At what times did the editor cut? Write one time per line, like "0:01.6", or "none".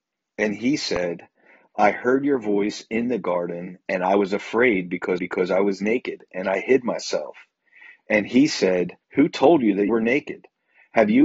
0:05.2
0:09.0
0:09.9

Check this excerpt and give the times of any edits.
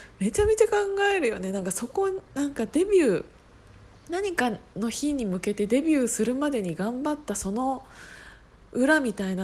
0:04.7

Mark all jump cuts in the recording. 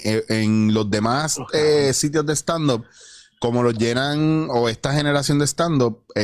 none

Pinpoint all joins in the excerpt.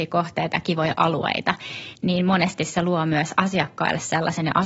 none

